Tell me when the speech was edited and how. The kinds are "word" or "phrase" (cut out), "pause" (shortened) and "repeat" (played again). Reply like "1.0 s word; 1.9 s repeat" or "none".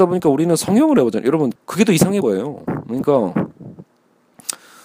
1.6 s pause; 2.2 s phrase